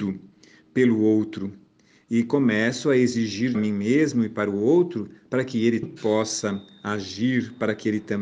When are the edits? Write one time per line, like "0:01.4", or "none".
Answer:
0:03.5
0:05.8